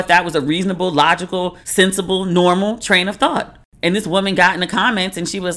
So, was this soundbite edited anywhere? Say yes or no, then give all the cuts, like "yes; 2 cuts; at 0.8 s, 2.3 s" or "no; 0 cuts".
yes; 1 cut; at 1.6 s